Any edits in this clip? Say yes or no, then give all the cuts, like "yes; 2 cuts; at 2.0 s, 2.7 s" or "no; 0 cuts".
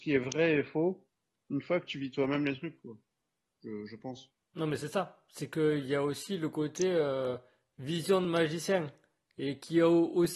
no; 0 cuts